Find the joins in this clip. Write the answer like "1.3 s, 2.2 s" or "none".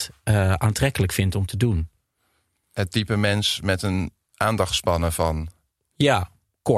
none